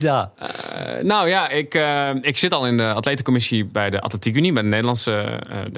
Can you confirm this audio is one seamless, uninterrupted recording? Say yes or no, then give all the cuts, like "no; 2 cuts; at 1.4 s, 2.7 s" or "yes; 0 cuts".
yes; 0 cuts